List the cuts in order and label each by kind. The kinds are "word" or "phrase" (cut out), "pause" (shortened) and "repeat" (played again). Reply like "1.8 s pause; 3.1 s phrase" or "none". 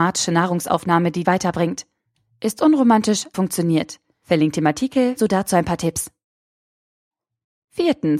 1.2 s word; 3.3 s word; 5.2 s word

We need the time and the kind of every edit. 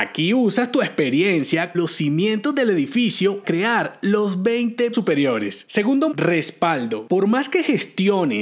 1.7 s word; 3.4 s word; 4.9 s word; 6.1 s word

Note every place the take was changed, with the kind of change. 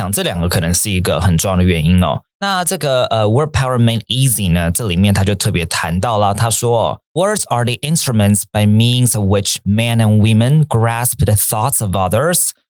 2.3 s pause; 7.0 s pause

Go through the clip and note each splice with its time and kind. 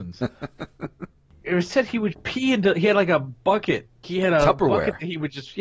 1.4 s word; 2.1 s word; 4.0 s word

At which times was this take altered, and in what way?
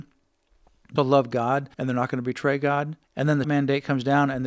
1.0 s word; 1.7 s pause; 3.0 s pause; 3.4 s word

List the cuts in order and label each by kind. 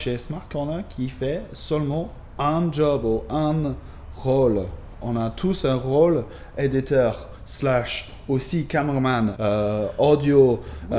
9.4 s word

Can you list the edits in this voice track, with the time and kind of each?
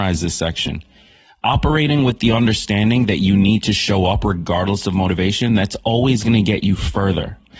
none

